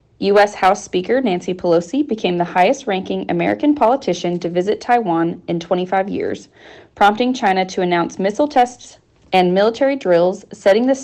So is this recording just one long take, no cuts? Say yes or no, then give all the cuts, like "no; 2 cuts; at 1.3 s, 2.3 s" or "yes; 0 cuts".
yes; 0 cuts